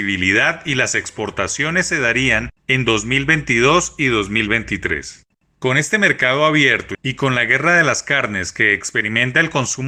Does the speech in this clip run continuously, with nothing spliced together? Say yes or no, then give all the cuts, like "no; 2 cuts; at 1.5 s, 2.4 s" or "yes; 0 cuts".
yes; 0 cuts